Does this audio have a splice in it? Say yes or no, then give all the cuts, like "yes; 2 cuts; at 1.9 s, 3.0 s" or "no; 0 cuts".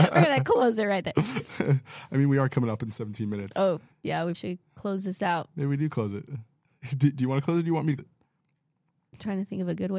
yes; 2 cuts; at 4.3 s, 8.0 s